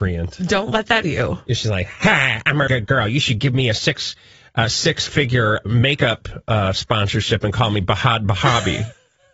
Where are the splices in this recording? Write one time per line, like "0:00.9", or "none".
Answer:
0:01.0
0:02.7